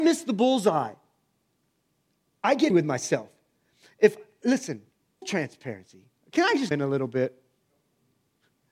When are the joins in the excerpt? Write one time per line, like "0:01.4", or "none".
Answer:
0:02.7
0:05.2
0:06.7